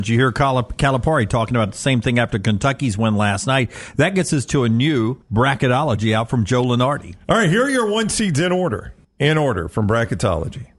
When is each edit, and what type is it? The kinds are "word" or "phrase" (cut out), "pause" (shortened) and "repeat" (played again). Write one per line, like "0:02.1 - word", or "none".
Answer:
0:05.2 - pause
0:09.0 - pause